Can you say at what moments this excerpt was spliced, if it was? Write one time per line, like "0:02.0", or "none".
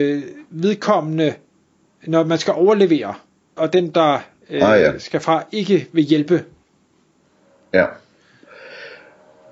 0:03.6